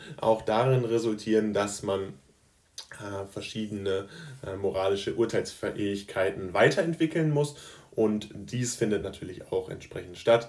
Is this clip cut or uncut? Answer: uncut